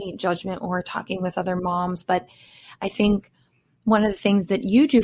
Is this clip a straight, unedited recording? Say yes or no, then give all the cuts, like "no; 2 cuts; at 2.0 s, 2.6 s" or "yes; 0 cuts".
yes; 0 cuts